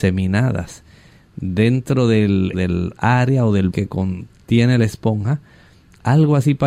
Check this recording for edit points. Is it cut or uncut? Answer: cut